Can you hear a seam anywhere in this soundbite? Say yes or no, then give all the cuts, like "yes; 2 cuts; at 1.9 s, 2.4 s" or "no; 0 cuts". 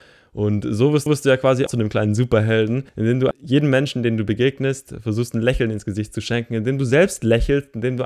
yes; 4 cuts; at 1.1 s, 1.7 s, 2.9 s, 3.3 s